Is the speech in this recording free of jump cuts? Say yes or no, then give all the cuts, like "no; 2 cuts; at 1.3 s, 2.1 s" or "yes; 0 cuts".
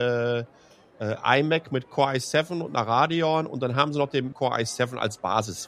no; 1 cut; at 4.3 s